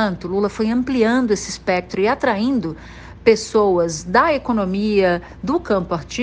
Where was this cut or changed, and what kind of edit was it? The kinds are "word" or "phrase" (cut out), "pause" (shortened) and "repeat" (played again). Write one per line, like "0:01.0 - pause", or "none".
none